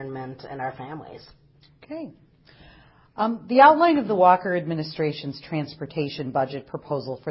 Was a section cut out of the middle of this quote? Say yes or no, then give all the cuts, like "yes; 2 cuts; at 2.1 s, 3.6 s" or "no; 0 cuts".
no; 0 cuts